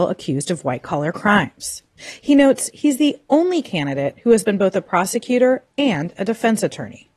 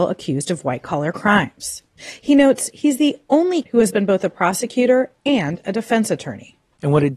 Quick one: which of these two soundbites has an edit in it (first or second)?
second